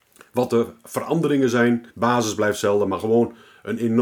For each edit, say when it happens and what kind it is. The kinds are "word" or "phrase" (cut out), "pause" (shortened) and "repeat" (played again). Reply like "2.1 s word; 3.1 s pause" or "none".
1.9 s pause